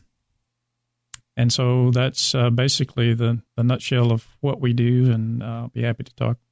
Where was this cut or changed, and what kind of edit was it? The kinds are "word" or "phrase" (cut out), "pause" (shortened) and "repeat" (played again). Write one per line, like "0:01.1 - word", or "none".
0:03.5 - pause